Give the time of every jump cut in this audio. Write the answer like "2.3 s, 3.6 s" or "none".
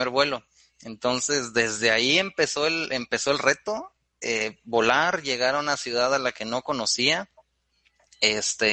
none

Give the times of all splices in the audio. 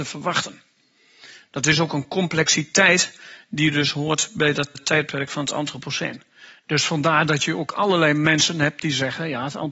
4.7 s

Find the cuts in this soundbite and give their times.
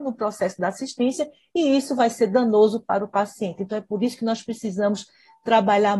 none

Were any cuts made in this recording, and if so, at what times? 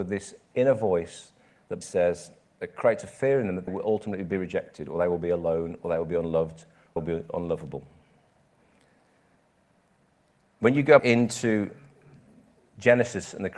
1.8 s, 3.7 s, 7.0 s, 11.0 s

